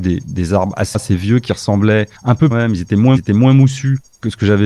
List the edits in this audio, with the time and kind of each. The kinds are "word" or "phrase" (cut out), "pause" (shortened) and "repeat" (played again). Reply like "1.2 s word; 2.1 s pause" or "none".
0.9 s word; 2.2 s pause; 2.5 s phrase; 3.2 s repeat